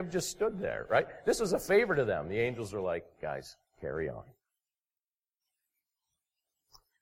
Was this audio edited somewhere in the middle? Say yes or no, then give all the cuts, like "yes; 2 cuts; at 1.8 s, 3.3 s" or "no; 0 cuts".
yes; 1 cut; at 3.7 s